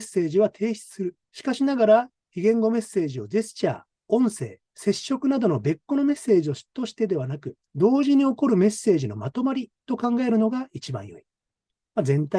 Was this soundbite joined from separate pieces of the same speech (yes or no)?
yes